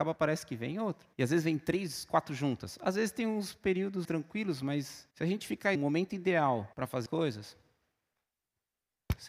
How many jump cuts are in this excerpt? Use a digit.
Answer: 6